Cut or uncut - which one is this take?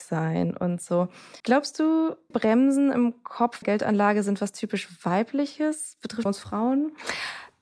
cut